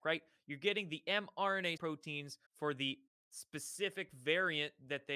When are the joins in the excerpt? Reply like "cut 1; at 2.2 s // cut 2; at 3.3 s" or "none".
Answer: cut 1; at 1.8 s // cut 2; at 2.5 s // cut 3; at 3.1 s